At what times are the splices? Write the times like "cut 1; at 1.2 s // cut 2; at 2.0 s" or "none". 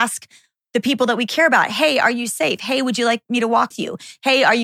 cut 1; at 3.7 s